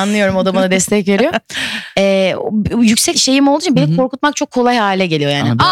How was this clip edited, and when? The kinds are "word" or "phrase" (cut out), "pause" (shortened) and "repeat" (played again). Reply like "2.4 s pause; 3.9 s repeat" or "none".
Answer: 3.1 s phrase